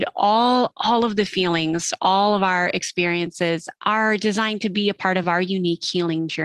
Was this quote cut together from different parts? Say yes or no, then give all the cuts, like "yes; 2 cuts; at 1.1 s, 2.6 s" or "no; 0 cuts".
no; 0 cuts